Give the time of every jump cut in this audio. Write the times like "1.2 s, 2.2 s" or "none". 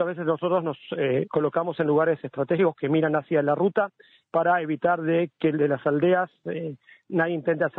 none

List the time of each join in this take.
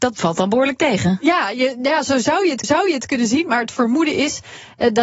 2.6 s

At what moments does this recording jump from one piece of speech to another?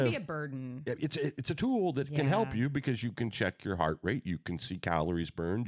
none

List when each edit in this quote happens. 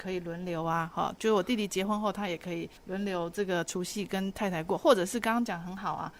2.8 s

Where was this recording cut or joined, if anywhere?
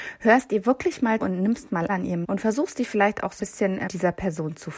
1.2 s, 1.9 s, 2.2 s, 3.4 s, 3.9 s

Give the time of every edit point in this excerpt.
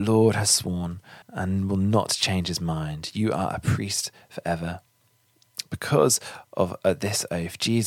1.2 s

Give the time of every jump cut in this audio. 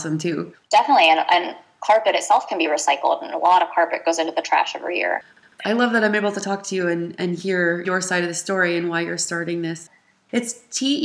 none

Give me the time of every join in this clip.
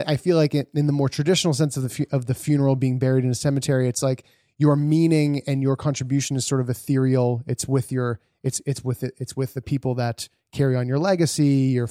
none

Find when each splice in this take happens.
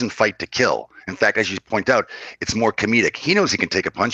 none

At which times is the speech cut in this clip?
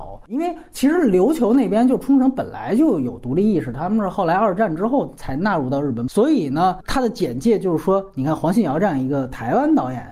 none

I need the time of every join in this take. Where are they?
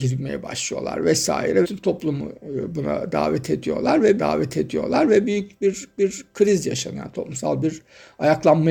1.6 s, 4.2 s, 6.0 s

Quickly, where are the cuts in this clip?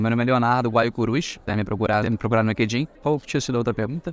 1.5 s, 2.0 s, 2.9 s

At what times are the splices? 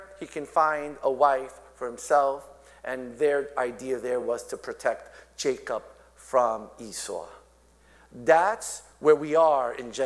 none

